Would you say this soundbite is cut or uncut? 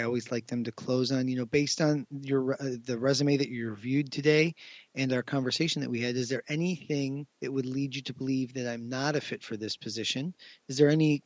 cut